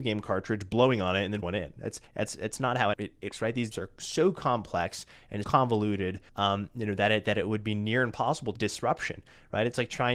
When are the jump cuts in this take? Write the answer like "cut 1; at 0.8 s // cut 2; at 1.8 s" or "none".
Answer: cut 1; at 1.4 s // cut 2; at 2.1 s // cut 3; at 2.9 s // cut 4; at 3.3 s // cut 5; at 3.7 s // cut 6; at 5.4 s // cut 7; at 6.3 s // cut 8; at 8.6 s